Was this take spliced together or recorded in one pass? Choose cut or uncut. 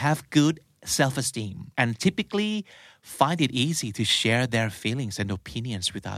cut